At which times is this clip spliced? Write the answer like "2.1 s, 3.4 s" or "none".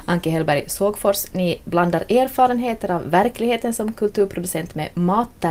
none